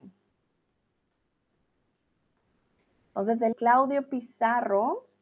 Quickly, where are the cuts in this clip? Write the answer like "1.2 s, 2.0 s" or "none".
3.5 s